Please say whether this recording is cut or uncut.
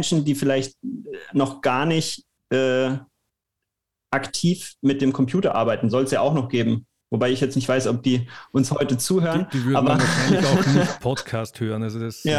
uncut